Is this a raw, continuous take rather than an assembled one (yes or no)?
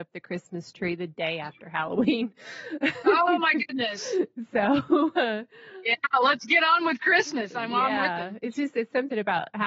yes